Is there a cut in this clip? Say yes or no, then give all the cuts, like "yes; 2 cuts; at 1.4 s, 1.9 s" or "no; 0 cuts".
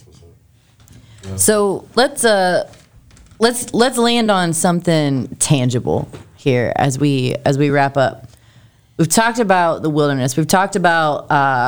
no; 0 cuts